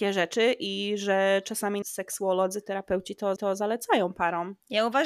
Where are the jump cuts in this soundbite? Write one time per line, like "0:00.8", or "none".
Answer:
0:01.8
0:03.4